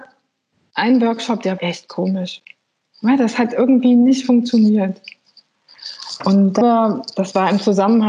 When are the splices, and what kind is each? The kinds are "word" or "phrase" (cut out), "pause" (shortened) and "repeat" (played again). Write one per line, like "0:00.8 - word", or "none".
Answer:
0:01.6 - word
0:06.6 - word